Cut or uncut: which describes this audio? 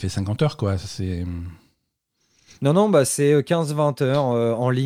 uncut